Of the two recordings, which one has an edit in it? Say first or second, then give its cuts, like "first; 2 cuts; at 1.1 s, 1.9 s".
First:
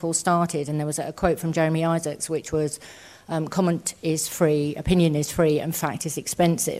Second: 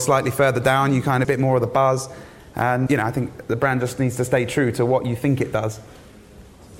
second; 2 cuts; at 1.2 s, 2.9 s